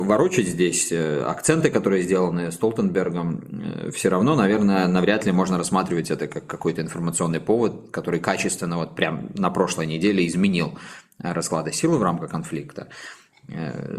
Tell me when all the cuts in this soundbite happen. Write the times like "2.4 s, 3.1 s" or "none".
none